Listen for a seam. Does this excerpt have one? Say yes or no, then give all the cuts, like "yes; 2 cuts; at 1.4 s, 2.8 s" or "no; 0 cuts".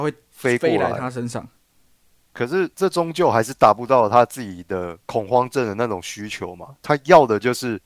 yes; 3 cuts; at 2.3 s, 2.7 s, 5.0 s